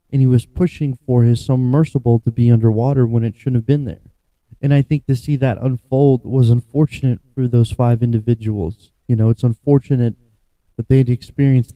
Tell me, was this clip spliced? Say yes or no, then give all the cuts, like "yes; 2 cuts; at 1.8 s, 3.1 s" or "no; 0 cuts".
no; 0 cuts